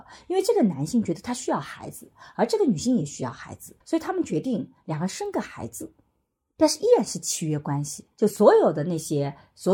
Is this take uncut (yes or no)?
no